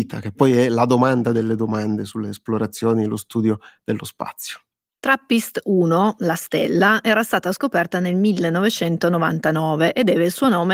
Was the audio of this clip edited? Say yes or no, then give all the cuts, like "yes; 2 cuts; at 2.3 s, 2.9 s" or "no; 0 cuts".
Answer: no; 0 cuts